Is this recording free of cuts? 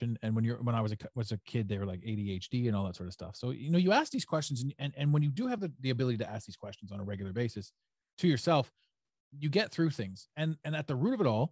yes; 0 cuts

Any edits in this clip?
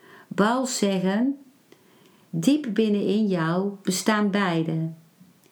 no; 0 cuts

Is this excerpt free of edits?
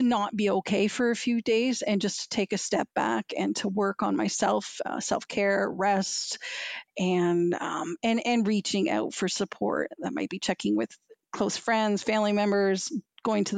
yes; 0 cuts

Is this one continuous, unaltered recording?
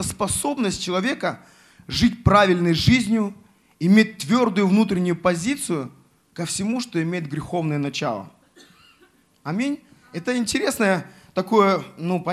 yes; 0 cuts

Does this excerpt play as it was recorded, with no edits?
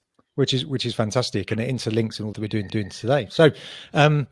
no; 2 cuts; at 2.3 s, 2.7 s

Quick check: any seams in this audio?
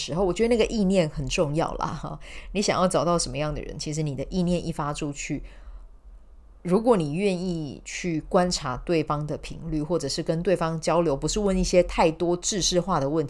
no; 0 cuts

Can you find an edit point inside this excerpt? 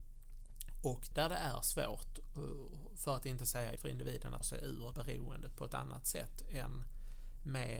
yes; 4 cuts; at 1.1 s, 3.8 s, 4.4 s, 4.9 s

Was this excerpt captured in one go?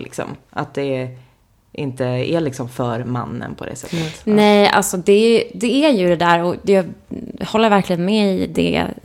yes; 0 cuts

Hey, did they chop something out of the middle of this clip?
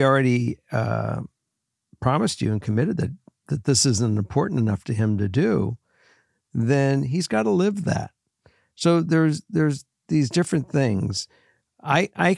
no; 0 cuts

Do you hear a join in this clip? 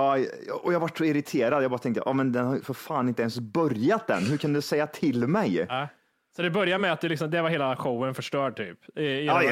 no; 0 cuts

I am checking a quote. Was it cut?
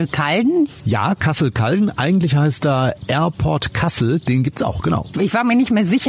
no; 0 cuts

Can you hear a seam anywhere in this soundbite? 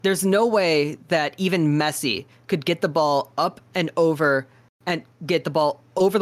no; 0 cuts

